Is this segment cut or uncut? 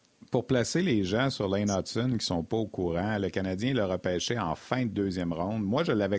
uncut